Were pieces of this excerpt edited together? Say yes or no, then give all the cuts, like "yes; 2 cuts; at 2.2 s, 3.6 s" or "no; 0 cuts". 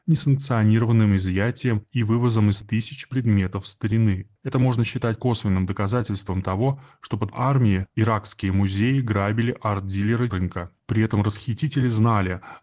yes; 5 cuts; at 2.6 s, 4.4 s, 7.3 s, 10.3 s, 10.8 s